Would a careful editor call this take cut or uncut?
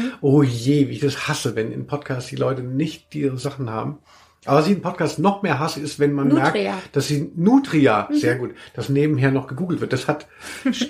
uncut